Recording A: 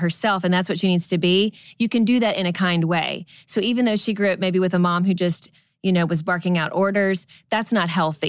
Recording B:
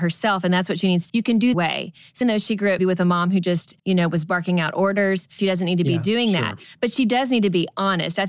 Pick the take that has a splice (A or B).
B